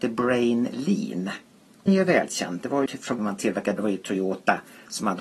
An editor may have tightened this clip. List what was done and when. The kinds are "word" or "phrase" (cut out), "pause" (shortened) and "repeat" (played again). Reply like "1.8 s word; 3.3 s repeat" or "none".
1.9 s word; 2.9 s word; 3.2 s word; 3.8 s word